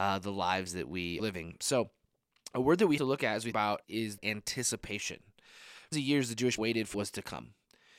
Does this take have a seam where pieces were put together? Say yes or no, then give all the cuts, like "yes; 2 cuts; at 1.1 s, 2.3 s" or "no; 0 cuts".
yes; 8 cuts; at 1.2 s, 3.0 s, 3.5 s, 3.8 s, 4.2 s, 5.9 s, 6.6 s, 6.9 s